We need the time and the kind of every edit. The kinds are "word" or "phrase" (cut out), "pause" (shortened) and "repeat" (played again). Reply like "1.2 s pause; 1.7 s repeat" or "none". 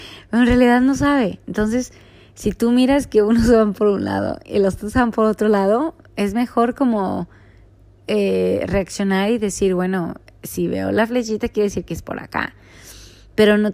none